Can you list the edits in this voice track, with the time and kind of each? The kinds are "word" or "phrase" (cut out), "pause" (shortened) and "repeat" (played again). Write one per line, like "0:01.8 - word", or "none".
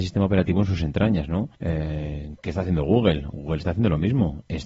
0:01.5 - pause